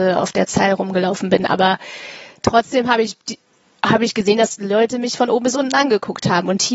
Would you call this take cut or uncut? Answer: uncut